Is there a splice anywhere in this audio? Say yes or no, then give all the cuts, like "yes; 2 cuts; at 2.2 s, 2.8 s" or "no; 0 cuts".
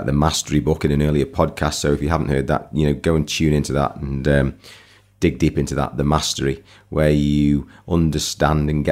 no; 0 cuts